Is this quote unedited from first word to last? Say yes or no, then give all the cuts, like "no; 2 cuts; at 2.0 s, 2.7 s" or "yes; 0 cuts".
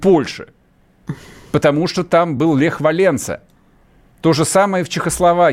yes; 0 cuts